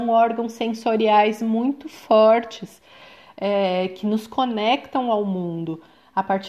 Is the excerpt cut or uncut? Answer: uncut